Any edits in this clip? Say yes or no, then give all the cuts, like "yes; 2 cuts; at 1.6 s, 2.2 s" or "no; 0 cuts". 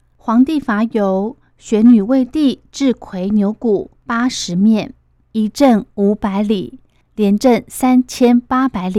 no; 0 cuts